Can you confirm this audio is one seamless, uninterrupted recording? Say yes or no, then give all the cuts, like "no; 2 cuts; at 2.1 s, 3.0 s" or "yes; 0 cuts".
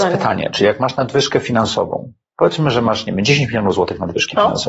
yes; 0 cuts